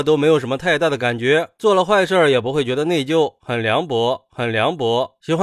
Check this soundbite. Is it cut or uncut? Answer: cut